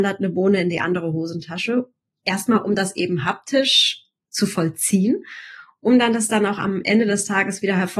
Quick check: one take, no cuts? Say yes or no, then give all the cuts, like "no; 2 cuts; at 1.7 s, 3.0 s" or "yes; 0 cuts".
yes; 0 cuts